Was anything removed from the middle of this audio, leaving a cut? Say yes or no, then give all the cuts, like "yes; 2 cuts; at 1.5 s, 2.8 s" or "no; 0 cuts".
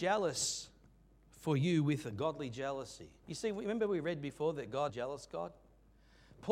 yes; 2 cuts; at 3.2 s, 4.9 s